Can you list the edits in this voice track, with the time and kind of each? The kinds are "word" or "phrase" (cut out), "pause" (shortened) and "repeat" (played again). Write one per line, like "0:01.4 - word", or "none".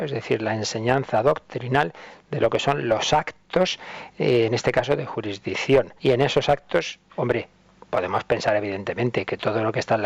0:06.0 - pause